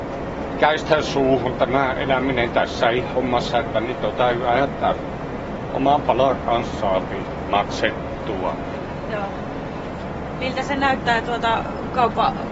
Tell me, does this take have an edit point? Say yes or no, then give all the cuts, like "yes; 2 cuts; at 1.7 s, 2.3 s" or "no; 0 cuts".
no; 0 cuts